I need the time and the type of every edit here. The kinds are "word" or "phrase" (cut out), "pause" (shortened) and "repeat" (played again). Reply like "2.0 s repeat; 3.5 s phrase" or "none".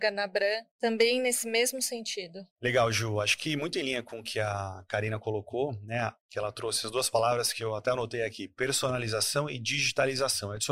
2.5 s pause